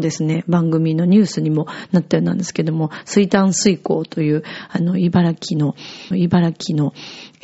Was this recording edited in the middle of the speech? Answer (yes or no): yes